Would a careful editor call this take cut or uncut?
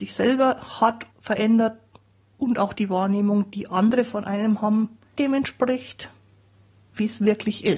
cut